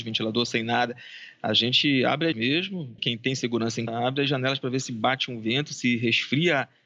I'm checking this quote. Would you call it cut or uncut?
cut